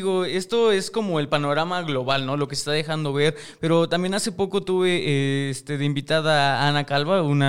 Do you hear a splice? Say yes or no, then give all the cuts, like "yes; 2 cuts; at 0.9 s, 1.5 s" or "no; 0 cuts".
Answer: no; 0 cuts